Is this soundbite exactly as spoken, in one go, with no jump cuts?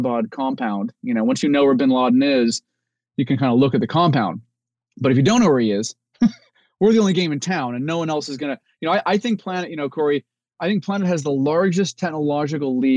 yes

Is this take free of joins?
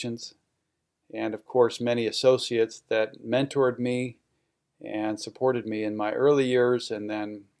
yes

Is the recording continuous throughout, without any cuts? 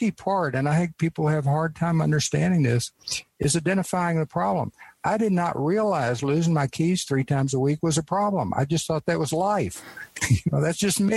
yes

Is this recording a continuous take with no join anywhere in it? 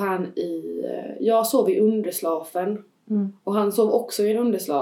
yes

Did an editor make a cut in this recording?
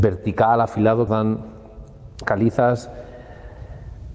yes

